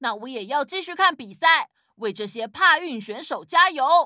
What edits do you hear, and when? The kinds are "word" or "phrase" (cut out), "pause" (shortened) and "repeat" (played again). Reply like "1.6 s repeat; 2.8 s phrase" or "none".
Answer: none